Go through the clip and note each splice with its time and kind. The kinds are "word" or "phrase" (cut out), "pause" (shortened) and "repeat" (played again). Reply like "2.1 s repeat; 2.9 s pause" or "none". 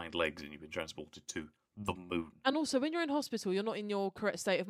none